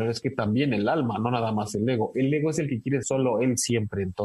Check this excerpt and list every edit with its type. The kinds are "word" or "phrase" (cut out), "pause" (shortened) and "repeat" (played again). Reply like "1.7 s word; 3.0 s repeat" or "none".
3.0 s word